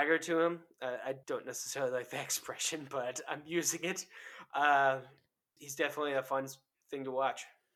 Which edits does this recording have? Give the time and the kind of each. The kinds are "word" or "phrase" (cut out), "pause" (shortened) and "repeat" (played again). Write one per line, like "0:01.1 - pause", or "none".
0:01.2 - pause
0:05.6 - word